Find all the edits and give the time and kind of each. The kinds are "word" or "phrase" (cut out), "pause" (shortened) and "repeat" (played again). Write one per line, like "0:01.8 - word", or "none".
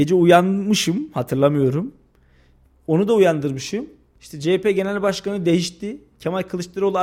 none

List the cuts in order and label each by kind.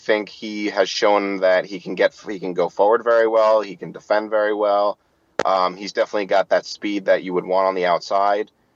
none

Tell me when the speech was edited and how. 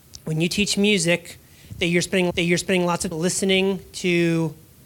0:02.3 - repeat
0:03.1 - word

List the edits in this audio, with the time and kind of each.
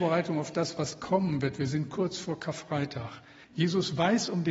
0:03.4 - pause

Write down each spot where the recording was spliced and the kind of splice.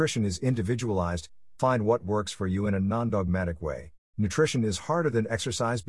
0:04.0 - pause

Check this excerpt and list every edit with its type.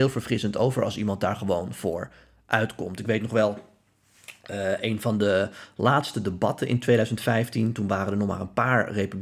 none

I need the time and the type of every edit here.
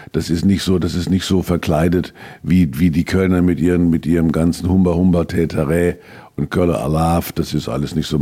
none

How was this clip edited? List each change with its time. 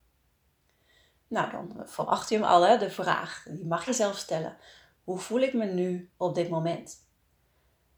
0:03.9 - phrase

